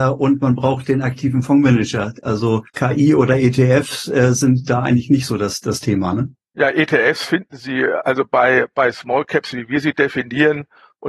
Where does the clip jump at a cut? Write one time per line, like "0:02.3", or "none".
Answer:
0:02.7
0:06.4